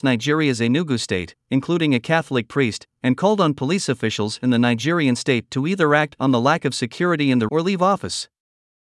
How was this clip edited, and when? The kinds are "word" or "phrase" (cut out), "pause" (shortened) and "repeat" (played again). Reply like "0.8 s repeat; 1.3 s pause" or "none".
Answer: 7.5 s word